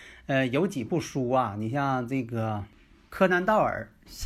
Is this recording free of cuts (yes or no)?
yes